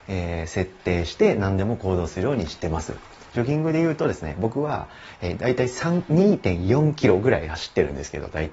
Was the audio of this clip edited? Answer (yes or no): no